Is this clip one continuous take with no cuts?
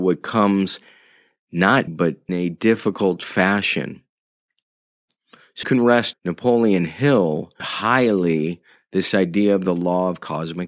no; 5 cuts; at 1.9 s, 2.3 s, 5.6 s, 6.1 s, 7.6 s

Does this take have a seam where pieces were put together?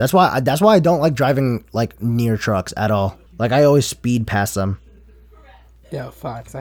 yes; 1 cut; at 3.3 s

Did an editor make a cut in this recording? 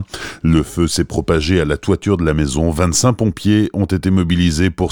no; 0 cuts

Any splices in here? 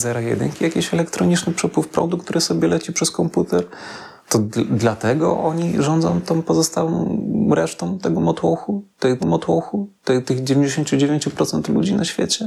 yes; 2 cuts; at 4.2 s, 9.2 s

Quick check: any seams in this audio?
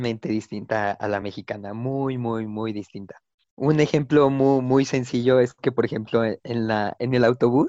no; 0 cuts

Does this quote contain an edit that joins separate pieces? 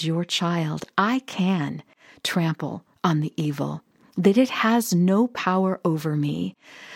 no; 0 cuts

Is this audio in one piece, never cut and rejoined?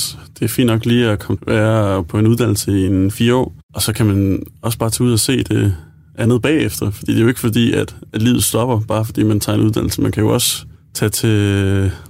no; 1 cut; at 1.4 s

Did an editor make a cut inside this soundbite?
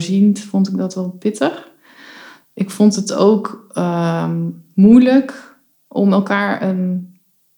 no; 0 cuts

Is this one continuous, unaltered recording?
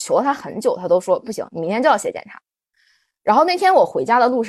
yes; 0 cuts

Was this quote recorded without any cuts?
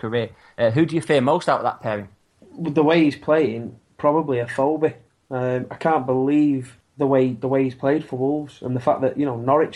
yes; 0 cuts

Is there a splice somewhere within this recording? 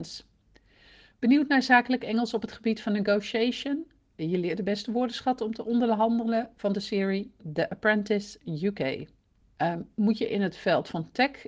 yes; 1 cut; at 9.4 s

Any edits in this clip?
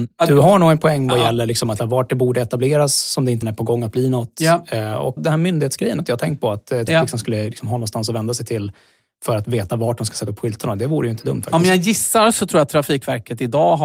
yes; 5 cuts; at 1.8 s, 3.4 s, 5.2 s, 6.0 s, 6.9 s

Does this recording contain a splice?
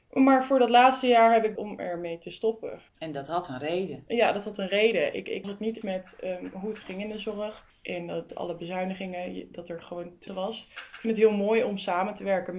yes; 6 cuts; at 1.6 s, 2.9 s, 5.4 s, 5.8 s, 8.3 s, 10.3 s

